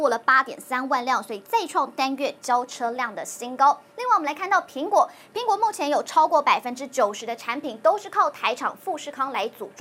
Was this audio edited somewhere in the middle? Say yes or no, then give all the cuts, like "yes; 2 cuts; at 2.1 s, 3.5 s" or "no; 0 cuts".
yes; 1 cut; at 3.9 s